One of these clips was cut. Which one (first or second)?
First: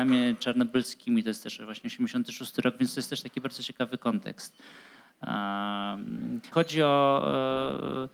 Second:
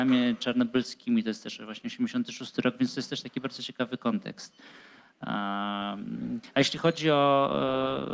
first